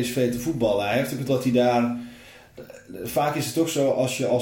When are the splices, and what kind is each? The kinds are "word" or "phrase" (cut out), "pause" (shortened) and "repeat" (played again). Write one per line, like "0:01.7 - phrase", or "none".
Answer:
0:01.3 - word